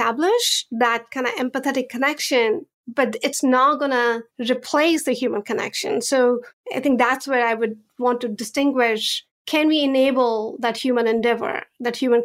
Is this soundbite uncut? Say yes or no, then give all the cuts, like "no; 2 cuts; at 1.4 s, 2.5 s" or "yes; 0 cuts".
no; 1 cut; at 4.3 s